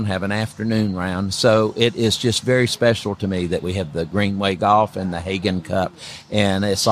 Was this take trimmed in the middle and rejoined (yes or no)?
no